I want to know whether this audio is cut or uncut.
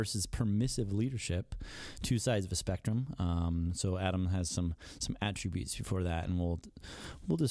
uncut